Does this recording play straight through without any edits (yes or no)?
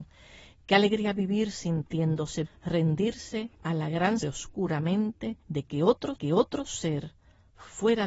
no